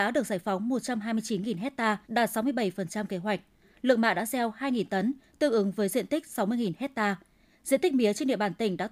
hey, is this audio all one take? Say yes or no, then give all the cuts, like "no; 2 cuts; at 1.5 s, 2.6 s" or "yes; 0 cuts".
no; 1 cut; at 2.0 s